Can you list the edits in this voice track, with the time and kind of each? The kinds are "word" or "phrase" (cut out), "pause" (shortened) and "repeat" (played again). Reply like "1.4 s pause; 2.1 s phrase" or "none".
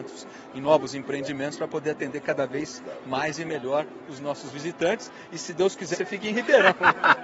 5.9 s phrase

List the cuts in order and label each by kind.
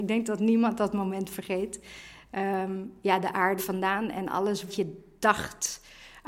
3.6 s phrase; 4.7 s word

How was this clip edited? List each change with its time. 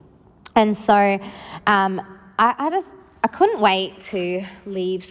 none

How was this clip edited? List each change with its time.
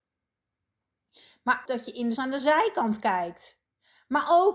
1.6 s word; 2.2 s word

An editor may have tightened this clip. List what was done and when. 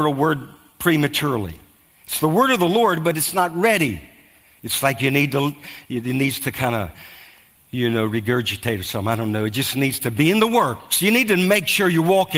none

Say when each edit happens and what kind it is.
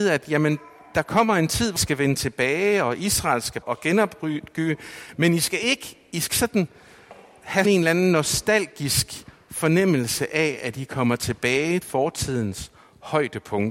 1.8 s word; 3.6 s word; 6.3 s word; 7.6 s word; 11.8 s word

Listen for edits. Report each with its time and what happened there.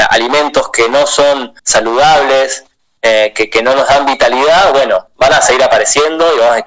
1.6 s pause

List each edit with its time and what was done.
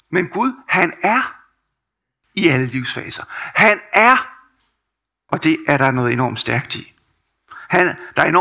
none

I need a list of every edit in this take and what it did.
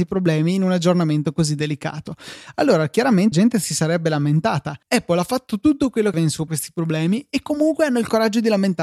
3.3 s word; 4.8 s pause; 6.1 s phrase; 6.5 s phrase

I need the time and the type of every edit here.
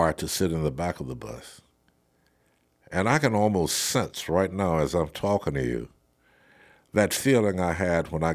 none

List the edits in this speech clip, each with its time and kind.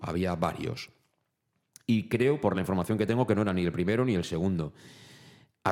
none

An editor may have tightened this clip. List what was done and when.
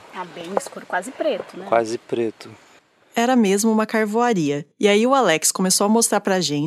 2.8 s pause; 4.7 s pause

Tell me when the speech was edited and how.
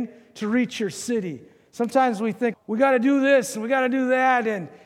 2.5 s word

